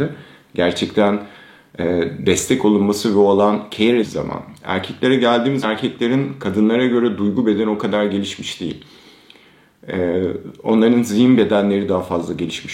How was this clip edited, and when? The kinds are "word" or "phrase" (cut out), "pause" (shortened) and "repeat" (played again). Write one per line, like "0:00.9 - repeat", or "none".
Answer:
0:04.0 - word
0:05.6 - word